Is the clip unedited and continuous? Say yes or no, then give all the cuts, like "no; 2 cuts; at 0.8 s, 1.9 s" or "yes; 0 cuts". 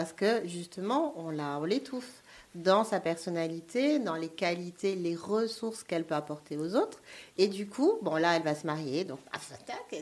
yes; 0 cuts